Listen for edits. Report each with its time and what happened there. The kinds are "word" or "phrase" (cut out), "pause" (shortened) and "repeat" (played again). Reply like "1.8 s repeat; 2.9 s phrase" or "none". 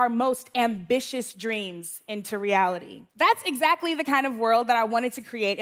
3.1 s pause